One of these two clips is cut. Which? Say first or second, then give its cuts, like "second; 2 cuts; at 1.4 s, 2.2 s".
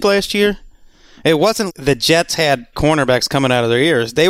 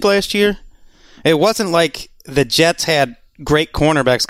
first; 2 cuts; at 1.7 s, 2.7 s